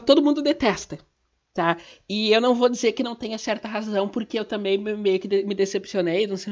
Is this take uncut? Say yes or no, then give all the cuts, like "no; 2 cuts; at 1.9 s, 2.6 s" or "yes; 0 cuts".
yes; 0 cuts